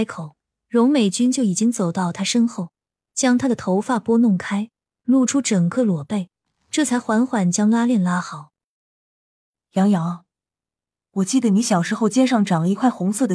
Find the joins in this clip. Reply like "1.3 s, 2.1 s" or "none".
none